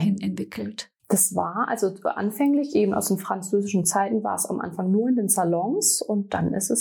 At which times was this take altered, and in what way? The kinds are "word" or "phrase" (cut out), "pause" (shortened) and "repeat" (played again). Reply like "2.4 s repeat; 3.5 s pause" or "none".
1.0 s pause